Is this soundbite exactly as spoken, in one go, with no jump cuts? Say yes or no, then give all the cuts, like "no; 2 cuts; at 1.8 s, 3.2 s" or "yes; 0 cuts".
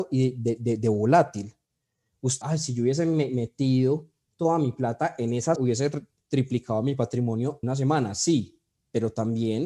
no; 3 cuts; at 2.4 s, 5.5 s, 7.6 s